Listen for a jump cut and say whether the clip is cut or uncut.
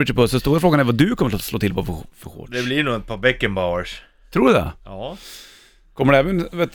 uncut